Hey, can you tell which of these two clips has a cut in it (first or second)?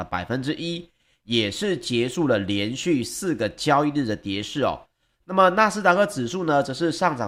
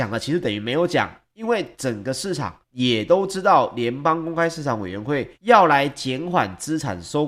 second